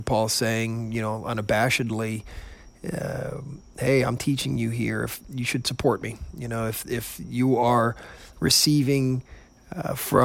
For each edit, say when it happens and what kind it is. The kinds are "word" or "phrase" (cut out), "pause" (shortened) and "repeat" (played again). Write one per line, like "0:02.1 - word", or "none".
none